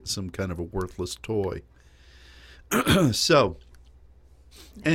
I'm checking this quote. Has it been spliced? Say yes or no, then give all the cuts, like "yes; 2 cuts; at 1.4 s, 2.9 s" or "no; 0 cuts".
no; 0 cuts